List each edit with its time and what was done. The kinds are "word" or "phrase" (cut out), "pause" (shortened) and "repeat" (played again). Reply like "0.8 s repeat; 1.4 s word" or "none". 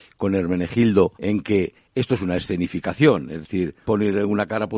1.1 s pause; 3.8 s word